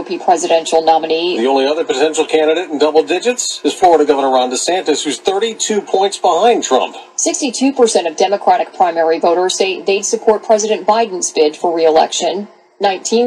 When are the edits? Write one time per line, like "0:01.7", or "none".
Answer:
none